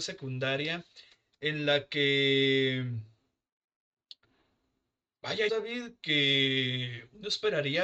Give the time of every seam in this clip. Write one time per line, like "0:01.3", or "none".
0:05.5